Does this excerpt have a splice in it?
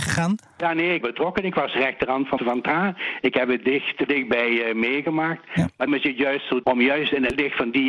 yes; 5 cuts; at 1.0 s, 2.4 s, 4.1 s, 5.9 s, 6.6 s

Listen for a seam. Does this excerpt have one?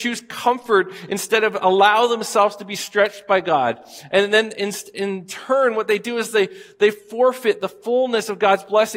no; 0 cuts

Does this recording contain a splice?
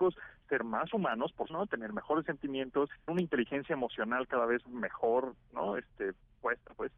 yes; 2 cuts; at 1.5 s, 3.1 s

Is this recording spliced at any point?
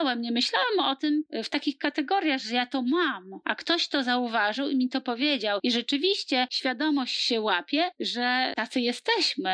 no; 0 cuts

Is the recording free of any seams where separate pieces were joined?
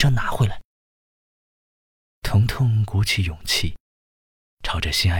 yes; 0 cuts

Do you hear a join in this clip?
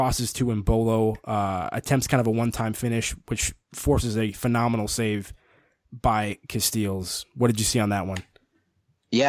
no; 0 cuts

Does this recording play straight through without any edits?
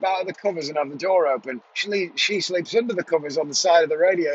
no; 1 cut; at 1.6 s

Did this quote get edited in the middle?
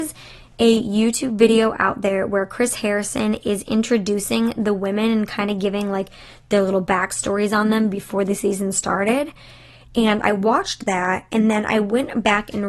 no; 0 cuts

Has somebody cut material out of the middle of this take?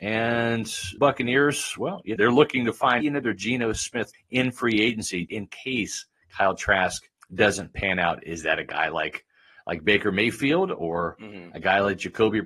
yes; 6 cuts; at 1.0 s, 2.2 s, 3.0 s, 4.1 s, 5.3 s, 7.2 s

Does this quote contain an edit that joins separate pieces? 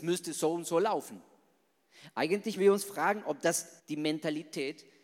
yes; 2 cuts; at 2.6 s, 3.8 s

